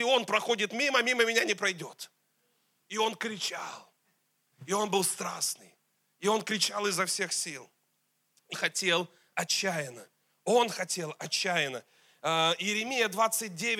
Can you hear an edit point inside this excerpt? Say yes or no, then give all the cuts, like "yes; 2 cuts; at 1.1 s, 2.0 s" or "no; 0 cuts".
yes; 1 cut; at 8.5 s